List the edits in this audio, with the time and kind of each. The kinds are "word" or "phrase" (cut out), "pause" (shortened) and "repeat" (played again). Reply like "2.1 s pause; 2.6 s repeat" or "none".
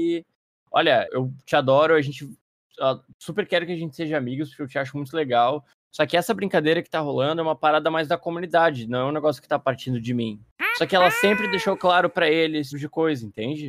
1.1 s word; 12.7 s word